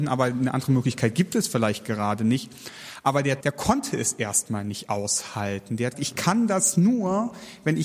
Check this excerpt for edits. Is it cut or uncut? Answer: cut